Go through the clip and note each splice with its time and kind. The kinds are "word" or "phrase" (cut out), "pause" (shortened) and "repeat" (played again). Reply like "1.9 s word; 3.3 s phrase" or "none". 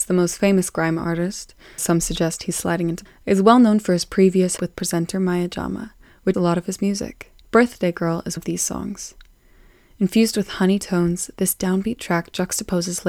1.8 s word; 3.1 s word; 4.6 s phrase; 6.3 s word; 7.4 s pause; 8.4 s word